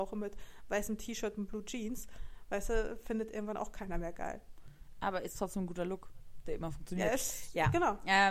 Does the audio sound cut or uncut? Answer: uncut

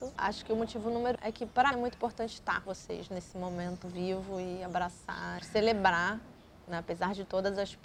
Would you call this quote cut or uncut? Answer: cut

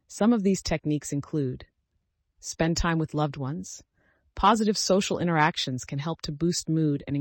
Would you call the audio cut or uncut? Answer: uncut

